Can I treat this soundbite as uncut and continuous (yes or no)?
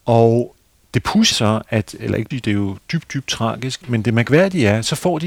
no